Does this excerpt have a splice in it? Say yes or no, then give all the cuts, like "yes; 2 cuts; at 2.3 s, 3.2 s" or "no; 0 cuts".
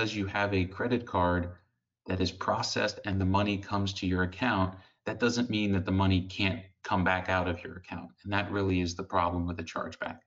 no; 0 cuts